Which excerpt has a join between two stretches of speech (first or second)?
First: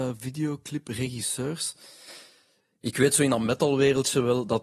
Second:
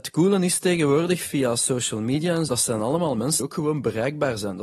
second